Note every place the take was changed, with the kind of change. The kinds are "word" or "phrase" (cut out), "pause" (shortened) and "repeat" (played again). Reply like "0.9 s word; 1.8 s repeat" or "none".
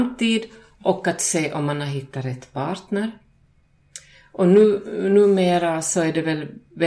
none